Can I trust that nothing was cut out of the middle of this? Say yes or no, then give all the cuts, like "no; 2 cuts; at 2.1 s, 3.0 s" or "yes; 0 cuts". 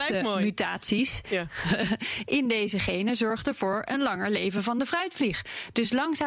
yes; 0 cuts